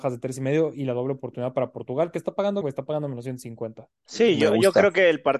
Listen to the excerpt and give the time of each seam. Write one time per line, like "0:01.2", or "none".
0:02.6

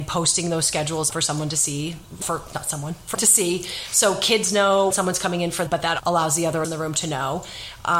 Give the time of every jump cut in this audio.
0:01.1
0:02.2
0:03.1
0:04.9
0:05.7
0:06.0
0:06.6

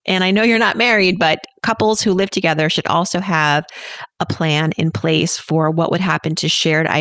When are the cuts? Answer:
none

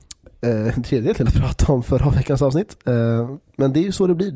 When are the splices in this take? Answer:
0:01.3

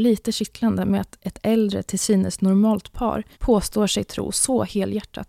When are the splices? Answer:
0:03.3

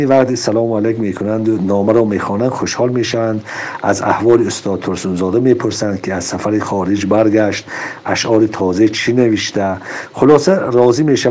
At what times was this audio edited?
none

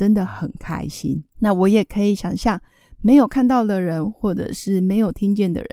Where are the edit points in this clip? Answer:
0:01.3

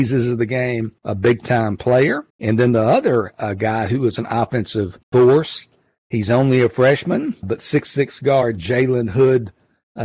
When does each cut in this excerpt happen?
0:01.0
0:02.3
0:05.0
0:07.4

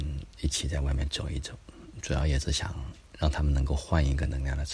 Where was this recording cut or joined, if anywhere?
none

